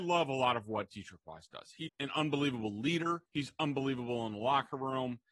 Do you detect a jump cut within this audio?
yes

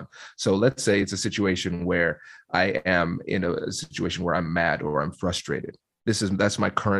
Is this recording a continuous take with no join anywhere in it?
yes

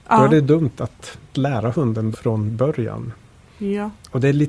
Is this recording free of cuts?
no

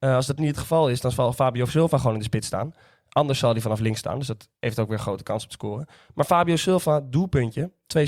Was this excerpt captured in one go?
no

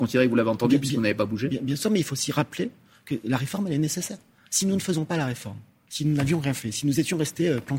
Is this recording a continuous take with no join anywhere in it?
yes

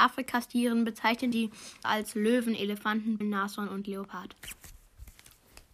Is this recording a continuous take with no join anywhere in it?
no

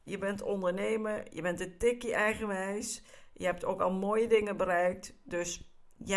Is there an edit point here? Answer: no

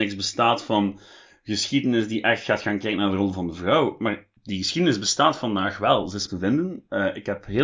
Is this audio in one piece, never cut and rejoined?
no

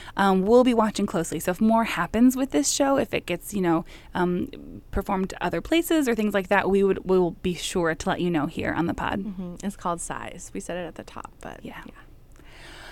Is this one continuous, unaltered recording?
yes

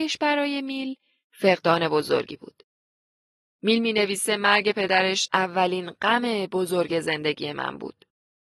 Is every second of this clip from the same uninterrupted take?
yes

